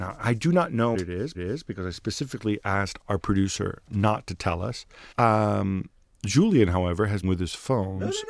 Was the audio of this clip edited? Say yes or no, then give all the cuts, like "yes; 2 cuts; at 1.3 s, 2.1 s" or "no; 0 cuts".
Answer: yes; 5 cuts; at 0.9 s, 1.3 s, 3.0 s, 5.1 s, 7.2 s